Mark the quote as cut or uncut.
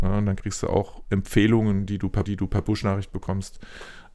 cut